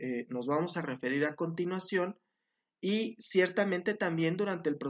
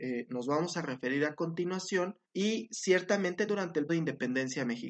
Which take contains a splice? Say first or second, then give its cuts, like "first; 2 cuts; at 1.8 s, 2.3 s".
second; 3 cuts; at 2.2 s, 3.5 s, 3.9 s